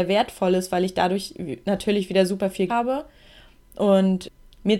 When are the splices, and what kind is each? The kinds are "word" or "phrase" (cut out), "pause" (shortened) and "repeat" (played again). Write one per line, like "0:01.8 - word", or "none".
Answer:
0:02.7 - word